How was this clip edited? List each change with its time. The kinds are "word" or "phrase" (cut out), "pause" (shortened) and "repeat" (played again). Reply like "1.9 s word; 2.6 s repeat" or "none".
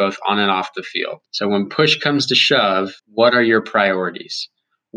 1.3 s pause; 3.0 s pause